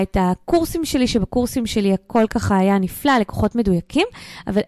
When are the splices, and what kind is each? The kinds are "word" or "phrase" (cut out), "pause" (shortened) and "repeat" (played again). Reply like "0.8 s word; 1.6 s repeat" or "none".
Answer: none